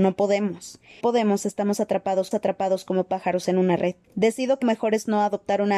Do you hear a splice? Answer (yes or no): yes